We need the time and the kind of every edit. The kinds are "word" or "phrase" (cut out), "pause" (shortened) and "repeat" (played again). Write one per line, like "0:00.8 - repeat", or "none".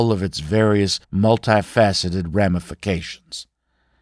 0:01.0 - pause

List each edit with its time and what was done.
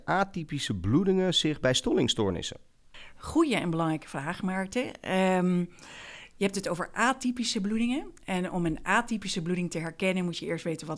none

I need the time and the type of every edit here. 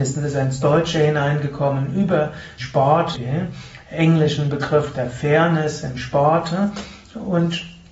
0:02.6 - word
0:03.1 - word

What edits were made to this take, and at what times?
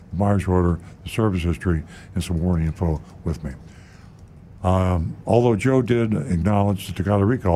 none

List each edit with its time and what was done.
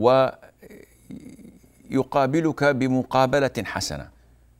none

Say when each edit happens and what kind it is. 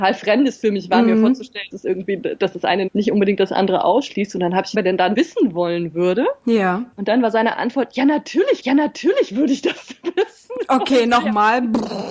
0:01.7 - word
0:02.9 - word
0:04.7 - phrase
0:05.1 - word
0:06.9 - pause
0:08.6 - repeat

